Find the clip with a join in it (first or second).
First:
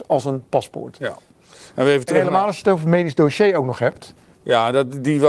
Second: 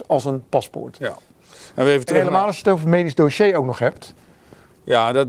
first